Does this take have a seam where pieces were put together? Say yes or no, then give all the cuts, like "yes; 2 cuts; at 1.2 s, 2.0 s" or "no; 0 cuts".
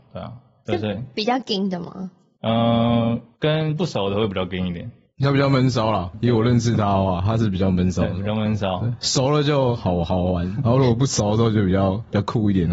no; 0 cuts